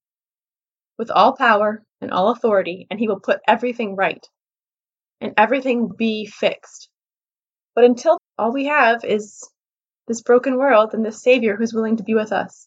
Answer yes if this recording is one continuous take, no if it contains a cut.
no